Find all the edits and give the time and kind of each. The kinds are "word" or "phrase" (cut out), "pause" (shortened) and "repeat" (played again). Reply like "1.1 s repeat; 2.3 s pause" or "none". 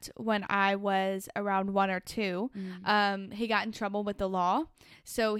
none